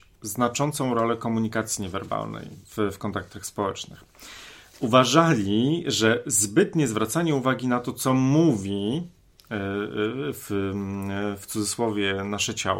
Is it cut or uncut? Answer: uncut